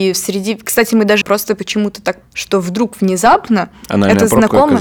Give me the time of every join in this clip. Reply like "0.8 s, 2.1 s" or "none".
1.2 s, 2.2 s

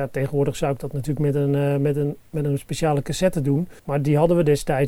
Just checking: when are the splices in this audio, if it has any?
3.8 s

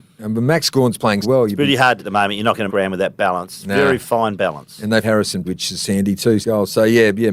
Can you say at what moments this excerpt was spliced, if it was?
1.2 s, 2.0 s, 2.7 s, 5.0 s, 5.4 s, 6.4 s

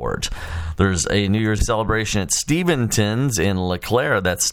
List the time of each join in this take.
1.6 s

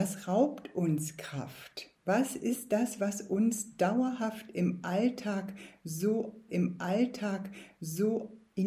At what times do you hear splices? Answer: 2.0 s, 6.5 s

